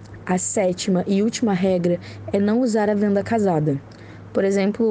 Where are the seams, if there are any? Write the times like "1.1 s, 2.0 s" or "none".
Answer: none